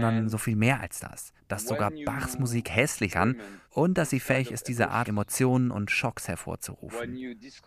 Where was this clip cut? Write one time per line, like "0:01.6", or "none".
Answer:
0:01.4
0:03.1
0:03.6
0:05.1